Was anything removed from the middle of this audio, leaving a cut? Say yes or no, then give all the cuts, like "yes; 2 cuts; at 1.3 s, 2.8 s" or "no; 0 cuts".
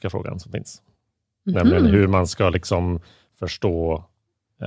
no; 0 cuts